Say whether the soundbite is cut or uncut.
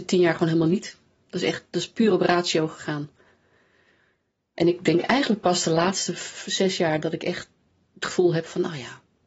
uncut